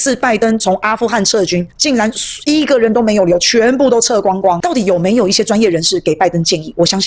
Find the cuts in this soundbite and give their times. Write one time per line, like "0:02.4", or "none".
0:01.7